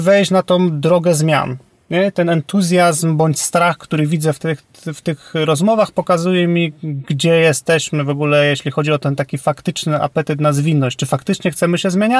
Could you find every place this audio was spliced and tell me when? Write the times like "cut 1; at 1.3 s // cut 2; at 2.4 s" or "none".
none